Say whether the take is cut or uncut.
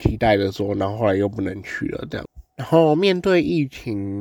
uncut